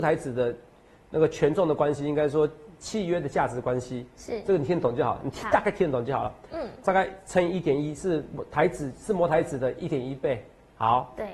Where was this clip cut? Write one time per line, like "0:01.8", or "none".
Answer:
0:06.8